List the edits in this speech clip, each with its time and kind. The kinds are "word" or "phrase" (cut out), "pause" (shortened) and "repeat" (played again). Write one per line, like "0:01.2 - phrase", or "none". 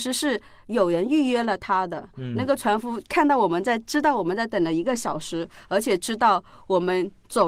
none